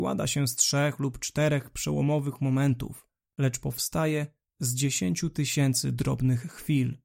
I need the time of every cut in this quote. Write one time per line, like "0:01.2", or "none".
none